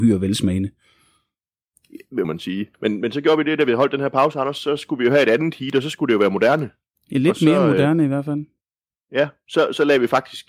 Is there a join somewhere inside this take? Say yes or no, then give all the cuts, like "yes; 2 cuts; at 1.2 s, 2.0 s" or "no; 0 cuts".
yes; 2 cuts; at 2.2 s, 2.7 s